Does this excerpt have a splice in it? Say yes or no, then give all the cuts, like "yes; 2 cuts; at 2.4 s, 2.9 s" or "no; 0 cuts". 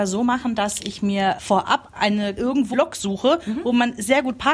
yes; 3 cuts; at 1.4 s, 2.4 s, 2.7 s